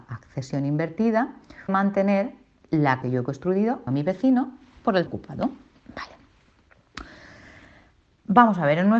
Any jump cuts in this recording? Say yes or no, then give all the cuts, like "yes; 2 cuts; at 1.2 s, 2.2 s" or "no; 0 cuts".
yes; 4 cuts; at 1.7 s, 3.0 s, 3.9 s, 5.1 s